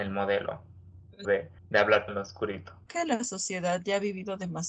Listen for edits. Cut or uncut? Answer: cut